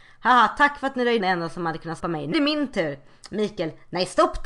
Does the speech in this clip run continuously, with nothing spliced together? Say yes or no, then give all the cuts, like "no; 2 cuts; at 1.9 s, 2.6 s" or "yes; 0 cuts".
no; 3 cuts; at 1.2 s, 2.0 s, 2.3 s